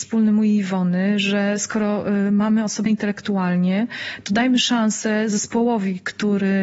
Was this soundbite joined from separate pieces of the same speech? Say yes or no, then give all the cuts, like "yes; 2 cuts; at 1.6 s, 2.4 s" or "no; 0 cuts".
yes; 1 cut; at 2.9 s